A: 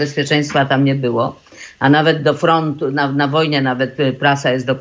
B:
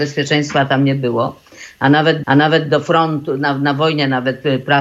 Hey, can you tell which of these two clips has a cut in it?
B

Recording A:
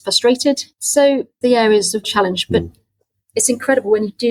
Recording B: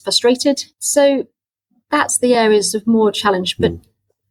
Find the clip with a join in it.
A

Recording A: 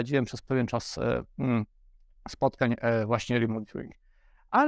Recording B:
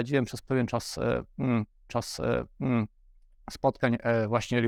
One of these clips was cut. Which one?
B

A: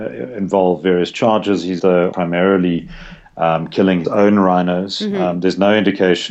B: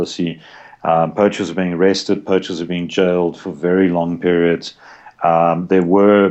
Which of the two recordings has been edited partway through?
A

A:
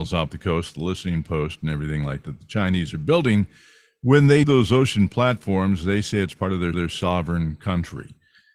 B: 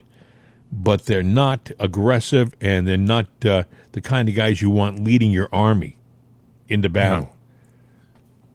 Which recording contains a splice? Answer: A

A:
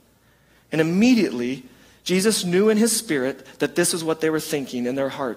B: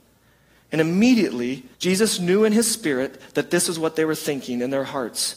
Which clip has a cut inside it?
B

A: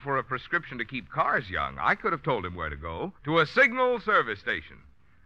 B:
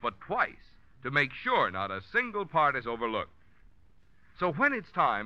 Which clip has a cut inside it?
A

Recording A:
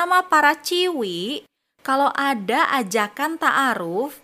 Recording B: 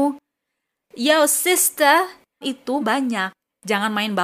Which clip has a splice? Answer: B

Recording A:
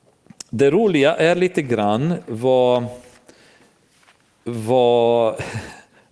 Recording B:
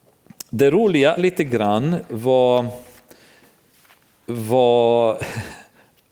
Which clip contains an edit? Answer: B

